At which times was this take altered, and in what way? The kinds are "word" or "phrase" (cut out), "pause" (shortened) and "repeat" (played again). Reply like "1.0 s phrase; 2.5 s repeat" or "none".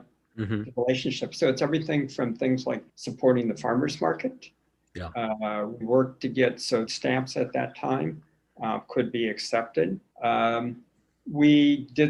2.9 s pause; 5.8 s word; 6.9 s phrase; 10.1 s pause